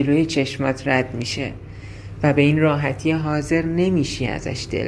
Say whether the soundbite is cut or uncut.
uncut